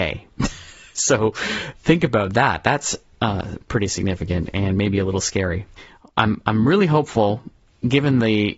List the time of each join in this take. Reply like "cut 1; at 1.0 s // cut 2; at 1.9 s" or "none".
none